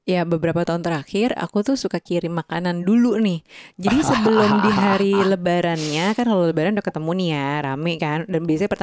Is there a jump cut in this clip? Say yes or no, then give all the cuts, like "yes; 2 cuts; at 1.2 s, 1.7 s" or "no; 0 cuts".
no; 0 cuts